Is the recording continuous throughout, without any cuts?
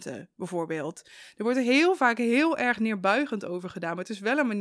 yes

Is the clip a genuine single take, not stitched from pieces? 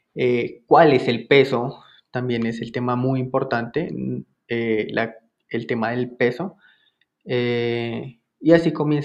yes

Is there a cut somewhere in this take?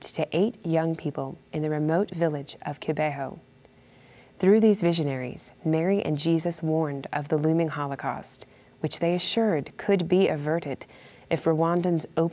no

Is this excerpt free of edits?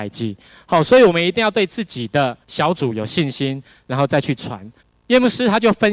no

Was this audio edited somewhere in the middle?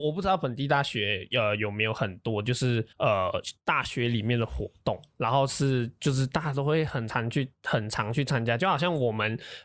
yes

